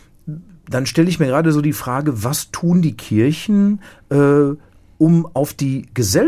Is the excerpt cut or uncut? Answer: uncut